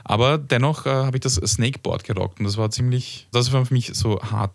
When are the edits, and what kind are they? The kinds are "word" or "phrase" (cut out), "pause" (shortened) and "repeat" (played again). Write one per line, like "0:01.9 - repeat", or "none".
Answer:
0:03.3 - word

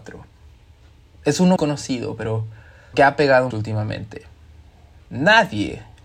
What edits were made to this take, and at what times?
0:01.6 - word
0:02.9 - word
0:03.5 - word

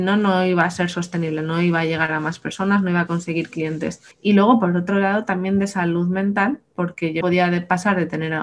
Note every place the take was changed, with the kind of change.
0:04.1 - pause
0:07.2 - word

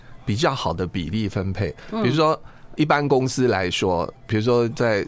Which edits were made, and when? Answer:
0:02.8 - word

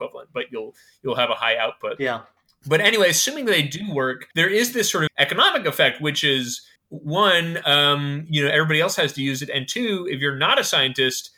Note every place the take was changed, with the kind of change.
0:04.3 - pause
0:05.1 - word
0:06.8 - pause

